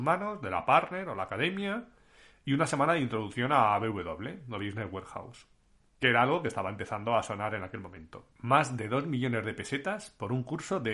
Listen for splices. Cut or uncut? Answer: cut